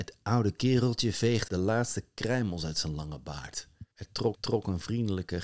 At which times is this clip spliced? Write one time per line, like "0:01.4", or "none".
0:01.5
0:03.9
0:04.3